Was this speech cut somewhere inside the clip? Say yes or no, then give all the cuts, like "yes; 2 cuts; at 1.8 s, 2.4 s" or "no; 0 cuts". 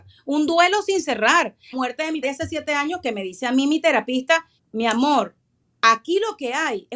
yes; 3 cuts; at 1.7 s, 2.2 s, 4.6 s